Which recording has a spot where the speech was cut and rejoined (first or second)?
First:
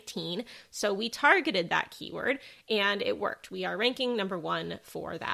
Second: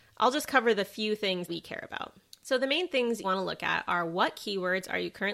second